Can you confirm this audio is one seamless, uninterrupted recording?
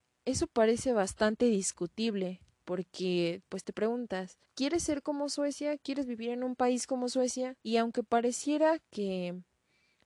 no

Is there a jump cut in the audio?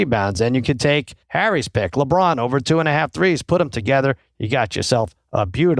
yes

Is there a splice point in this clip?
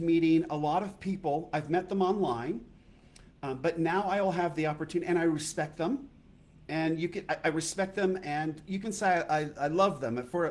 yes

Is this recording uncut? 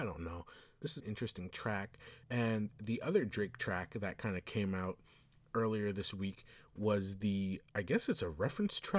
no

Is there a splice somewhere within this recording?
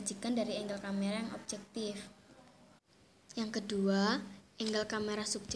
no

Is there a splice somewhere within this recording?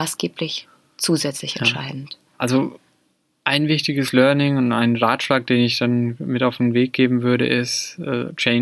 no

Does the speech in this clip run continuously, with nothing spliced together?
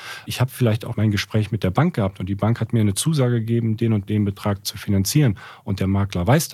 no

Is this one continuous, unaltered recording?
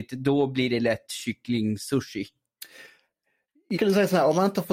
no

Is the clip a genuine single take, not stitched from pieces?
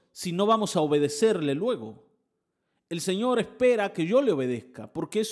yes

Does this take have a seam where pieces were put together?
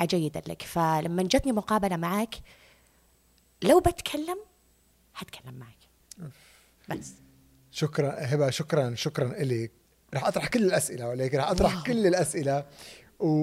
no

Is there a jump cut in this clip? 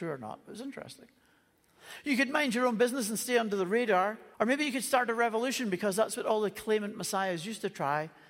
yes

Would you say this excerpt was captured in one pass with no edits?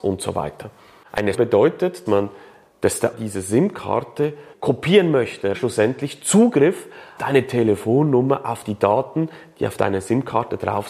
no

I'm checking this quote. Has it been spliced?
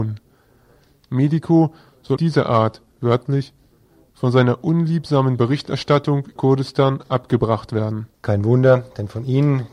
yes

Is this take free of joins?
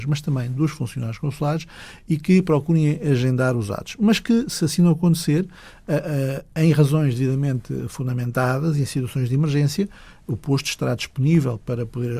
yes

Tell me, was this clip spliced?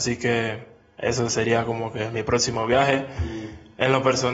no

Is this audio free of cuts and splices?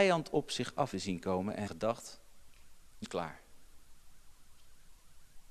no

